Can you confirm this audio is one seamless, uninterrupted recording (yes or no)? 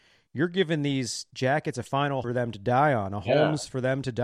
no